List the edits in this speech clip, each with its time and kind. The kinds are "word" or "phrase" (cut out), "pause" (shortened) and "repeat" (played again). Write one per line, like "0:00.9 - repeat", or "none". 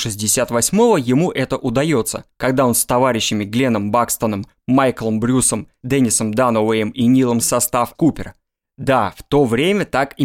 0:07.4 - phrase
0:07.9 - word